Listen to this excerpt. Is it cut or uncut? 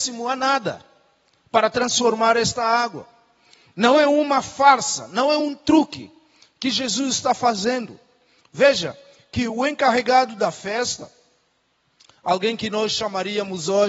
uncut